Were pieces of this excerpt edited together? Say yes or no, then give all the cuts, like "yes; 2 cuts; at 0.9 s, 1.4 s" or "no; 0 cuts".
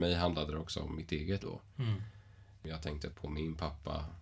yes; 2 cuts; at 1.4 s, 3.1 s